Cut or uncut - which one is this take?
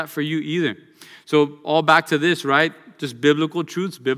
uncut